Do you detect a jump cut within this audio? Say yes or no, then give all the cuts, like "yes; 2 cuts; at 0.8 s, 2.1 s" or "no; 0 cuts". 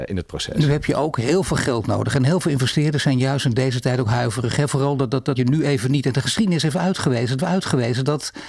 yes; 2 cuts; at 5.4 s, 7.4 s